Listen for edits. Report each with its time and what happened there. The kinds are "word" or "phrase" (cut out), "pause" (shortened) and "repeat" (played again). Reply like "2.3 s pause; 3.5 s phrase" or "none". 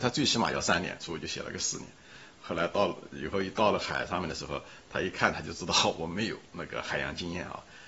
6.4 s pause